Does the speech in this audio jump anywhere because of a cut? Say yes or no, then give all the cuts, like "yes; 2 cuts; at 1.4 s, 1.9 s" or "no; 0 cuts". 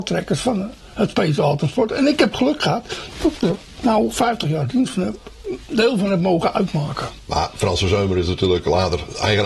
no; 0 cuts